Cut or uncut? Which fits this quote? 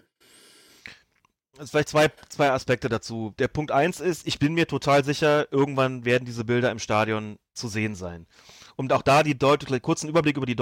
uncut